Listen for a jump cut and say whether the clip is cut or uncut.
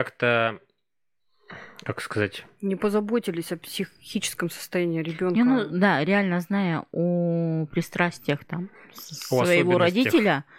uncut